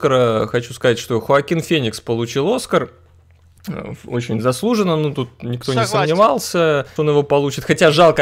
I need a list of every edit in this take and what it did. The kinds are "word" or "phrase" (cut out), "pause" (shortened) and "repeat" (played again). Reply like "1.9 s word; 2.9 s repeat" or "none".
7.0 s phrase